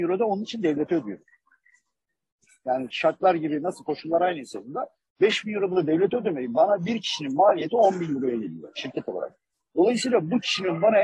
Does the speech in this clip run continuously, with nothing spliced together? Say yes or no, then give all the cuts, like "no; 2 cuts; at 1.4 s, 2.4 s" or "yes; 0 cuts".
no; 1 cut; at 2.9 s